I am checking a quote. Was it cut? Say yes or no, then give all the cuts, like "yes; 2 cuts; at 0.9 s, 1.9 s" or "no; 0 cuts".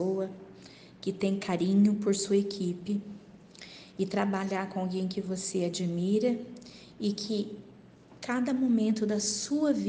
no; 0 cuts